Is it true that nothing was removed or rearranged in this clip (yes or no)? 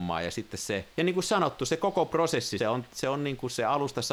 no